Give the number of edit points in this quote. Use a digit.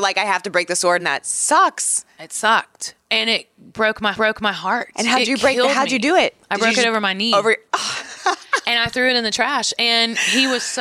3